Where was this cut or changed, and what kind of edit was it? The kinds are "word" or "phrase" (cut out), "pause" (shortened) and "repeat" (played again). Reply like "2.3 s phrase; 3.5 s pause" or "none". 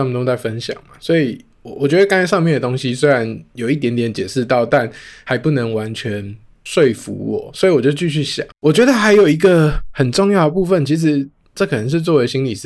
8.5 s pause